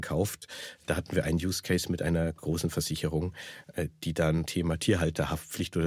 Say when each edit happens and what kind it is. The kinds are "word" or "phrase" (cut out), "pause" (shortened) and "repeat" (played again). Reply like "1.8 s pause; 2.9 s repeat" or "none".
4.5 s word

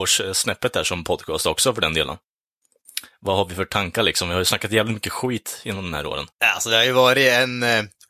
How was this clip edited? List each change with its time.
6.3 s pause

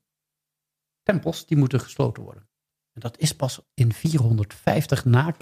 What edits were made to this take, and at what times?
none

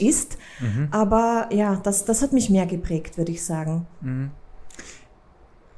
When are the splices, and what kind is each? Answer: none

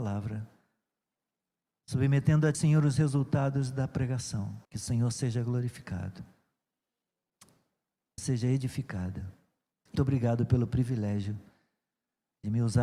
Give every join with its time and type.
2.5 s word; 4.6 s pause; 8.2 s phrase; 9.9 s word

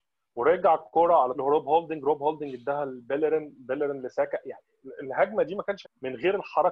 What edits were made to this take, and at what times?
1.3 s word; 5.8 s word

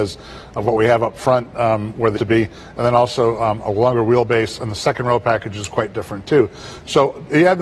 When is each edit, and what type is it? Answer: 2.2 s phrase

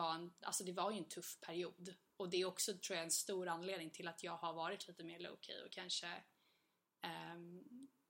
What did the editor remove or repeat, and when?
none

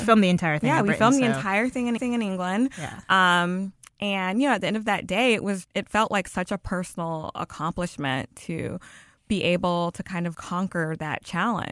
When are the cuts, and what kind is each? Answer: 2.0 s repeat; 5.6 s word; 10.3 s word

